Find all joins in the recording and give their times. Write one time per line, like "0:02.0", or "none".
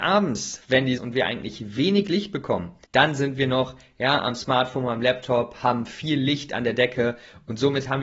0:01.0
0:02.8